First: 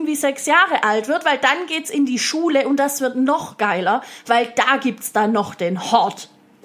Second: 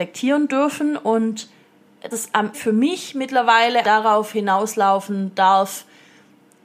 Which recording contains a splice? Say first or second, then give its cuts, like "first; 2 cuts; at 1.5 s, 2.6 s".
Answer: second; 3 cuts; at 2.1 s, 2.5 s, 3.8 s